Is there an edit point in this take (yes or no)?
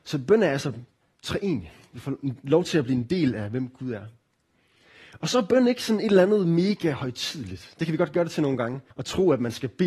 yes